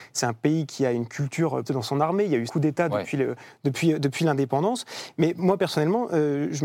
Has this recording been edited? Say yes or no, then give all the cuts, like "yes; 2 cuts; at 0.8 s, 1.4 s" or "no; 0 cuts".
yes; 2 cuts; at 1.7 s, 2.5 s